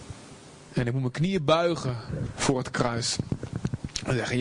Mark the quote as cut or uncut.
uncut